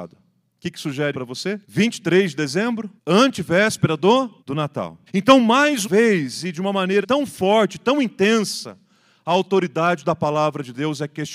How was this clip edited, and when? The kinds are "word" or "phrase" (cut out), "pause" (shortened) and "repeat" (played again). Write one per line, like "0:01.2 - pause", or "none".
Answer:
0:01.1 - word
0:01.6 - pause
0:03.0 - pause
0:04.4 - pause
0:05.1 - pause
0:05.8 - word
0:07.0 - word